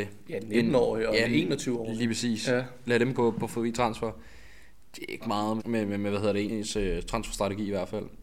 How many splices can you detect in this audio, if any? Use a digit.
4